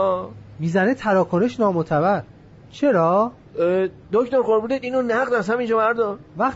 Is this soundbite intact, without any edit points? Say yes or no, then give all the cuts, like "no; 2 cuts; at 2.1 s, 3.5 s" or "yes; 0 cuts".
yes; 0 cuts